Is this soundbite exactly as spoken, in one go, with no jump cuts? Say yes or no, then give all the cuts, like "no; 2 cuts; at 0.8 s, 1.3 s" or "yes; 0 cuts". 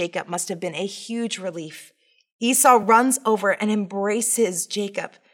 yes; 0 cuts